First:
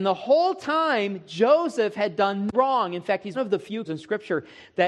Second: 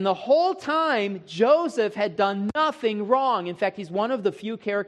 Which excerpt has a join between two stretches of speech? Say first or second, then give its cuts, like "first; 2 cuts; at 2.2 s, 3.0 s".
first; 3 cuts; at 2.5 s, 3.3 s, 3.8 s